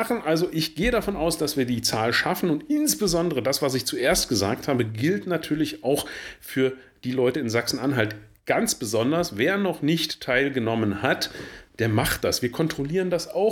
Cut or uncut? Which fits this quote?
uncut